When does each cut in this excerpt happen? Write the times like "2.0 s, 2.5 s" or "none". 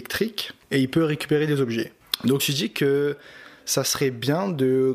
2.4 s